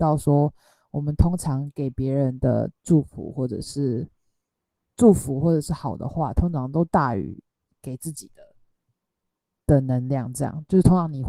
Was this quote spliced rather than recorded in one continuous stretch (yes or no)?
no